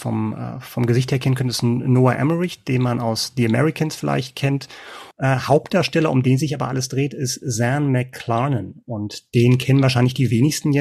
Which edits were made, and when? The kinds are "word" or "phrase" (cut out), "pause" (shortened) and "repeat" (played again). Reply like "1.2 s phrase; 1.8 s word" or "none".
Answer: 5.1 s pause